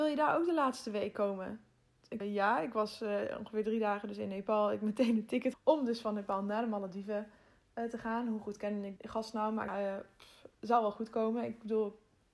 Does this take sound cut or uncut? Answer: cut